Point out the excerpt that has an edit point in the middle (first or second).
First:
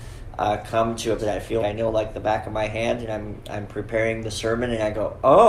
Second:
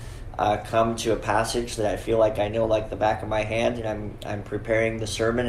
first